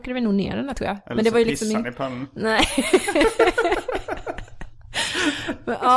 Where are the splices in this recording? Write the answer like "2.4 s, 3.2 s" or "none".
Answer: none